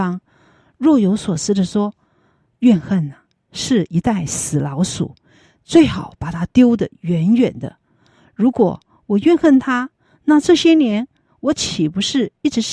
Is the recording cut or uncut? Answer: uncut